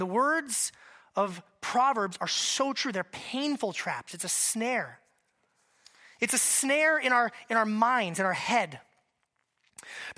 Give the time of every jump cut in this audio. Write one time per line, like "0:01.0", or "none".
none

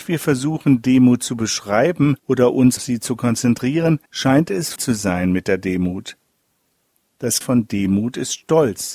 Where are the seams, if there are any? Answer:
0:02.2
0:02.8
0:04.1
0:04.8
0:07.4

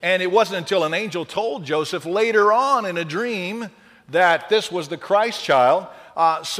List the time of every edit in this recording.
none

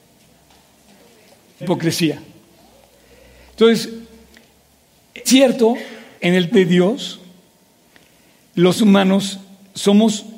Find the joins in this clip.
0:01.6
0:05.3
0:06.2
0:06.5
0:08.8

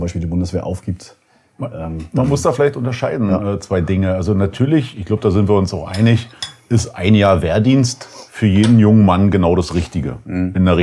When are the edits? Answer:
none

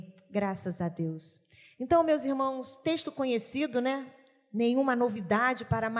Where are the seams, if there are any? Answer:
none

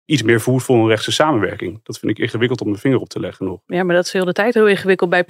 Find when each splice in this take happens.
none

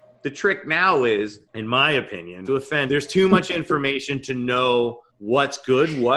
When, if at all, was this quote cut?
0:01.5
0:02.5
0:02.9
0:05.1

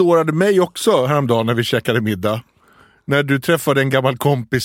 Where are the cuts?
none

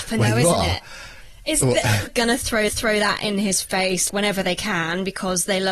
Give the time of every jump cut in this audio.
0:02.1
0:02.7
0:04.1

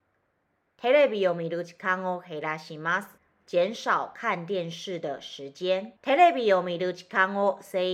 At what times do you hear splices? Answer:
0:03.2
0:06.0

